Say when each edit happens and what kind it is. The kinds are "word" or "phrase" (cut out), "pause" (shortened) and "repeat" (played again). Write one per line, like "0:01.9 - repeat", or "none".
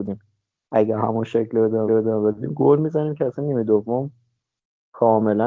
0:01.9 - repeat